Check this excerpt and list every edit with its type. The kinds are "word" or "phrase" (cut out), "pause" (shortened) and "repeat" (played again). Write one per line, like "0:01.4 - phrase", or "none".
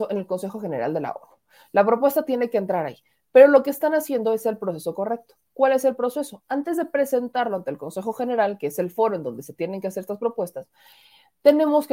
none